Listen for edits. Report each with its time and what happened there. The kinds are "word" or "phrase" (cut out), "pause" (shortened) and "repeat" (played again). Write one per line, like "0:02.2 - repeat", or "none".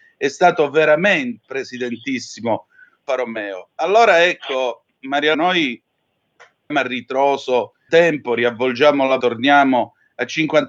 0:01.4 - word
0:03.1 - word
0:05.3 - word
0:06.7 - word
0:07.9 - word
0:09.2 - word